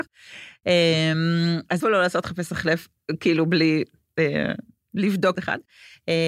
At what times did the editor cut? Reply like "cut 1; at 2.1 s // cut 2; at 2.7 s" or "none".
cut 1; at 1.8 s // cut 2; at 5.3 s